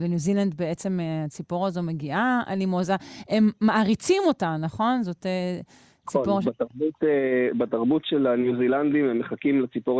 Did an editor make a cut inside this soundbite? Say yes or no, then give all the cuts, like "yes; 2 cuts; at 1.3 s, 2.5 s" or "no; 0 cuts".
no; 0 cuts